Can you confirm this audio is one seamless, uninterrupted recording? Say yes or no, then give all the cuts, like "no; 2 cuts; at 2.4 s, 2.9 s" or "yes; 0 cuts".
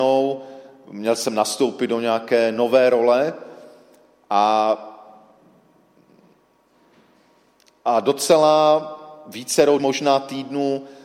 no; 1 cut; at 9.8 s